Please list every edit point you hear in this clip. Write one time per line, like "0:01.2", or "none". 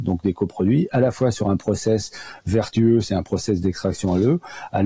none